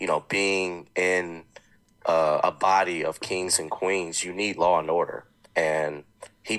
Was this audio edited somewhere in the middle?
no; 0 cuts

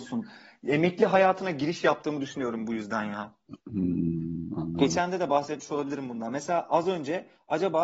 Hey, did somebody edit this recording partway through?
no; 0 cuts

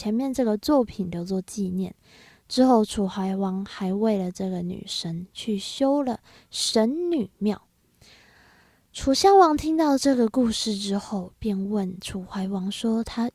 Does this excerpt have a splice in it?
no; 0 cuts

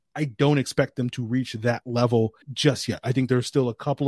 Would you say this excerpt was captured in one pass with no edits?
no; 1 cut; at 2.4 s

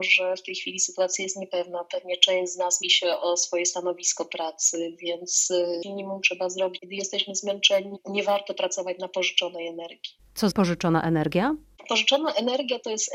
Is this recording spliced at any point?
yes; 4 cuts; at 2.8 s, 5.8 s, 6.8 s, 10.5 s

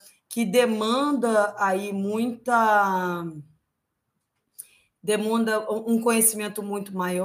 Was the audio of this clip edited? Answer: no; 0 cuts

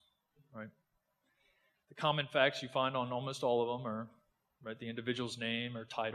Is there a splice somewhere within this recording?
no; 0 cuts

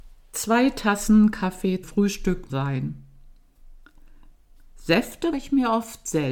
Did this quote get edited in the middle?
yes; 3 cuts; at 1.8 s, 2.5 s, 5.3 s

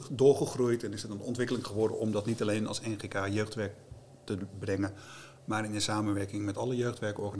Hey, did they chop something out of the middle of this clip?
no; 0 cuts

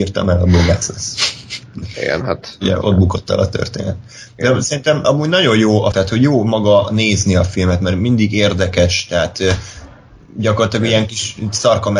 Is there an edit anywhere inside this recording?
yes; 3 cuts; at 2.8 s, 5.0 s, 5.9 s

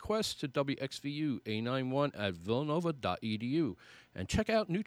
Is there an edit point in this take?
no; 0 cuts

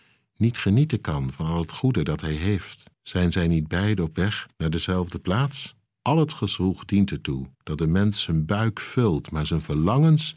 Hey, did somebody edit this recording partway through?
yes; 4 cuts; at 2.9 s, 4.5 s, 5.9 s, 7.5 s

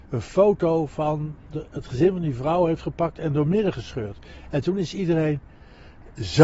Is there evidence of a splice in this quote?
no; 0 cuts

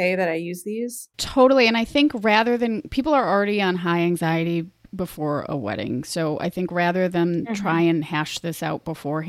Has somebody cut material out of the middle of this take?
yes; 1 cut; at 1.1 s

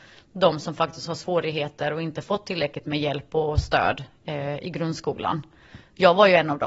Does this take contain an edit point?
no; 0 cuts

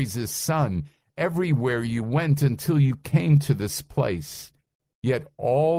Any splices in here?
no; 0 cuts

